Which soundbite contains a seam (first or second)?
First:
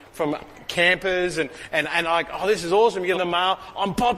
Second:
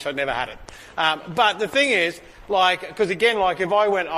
first